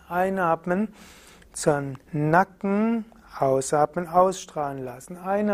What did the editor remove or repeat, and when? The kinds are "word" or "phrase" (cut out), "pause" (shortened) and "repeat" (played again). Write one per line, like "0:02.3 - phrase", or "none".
0:02.0 - pause